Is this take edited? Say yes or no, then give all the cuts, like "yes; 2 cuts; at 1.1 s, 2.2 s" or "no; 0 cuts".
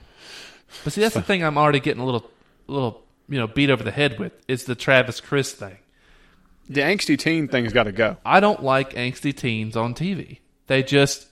no; 0 cuts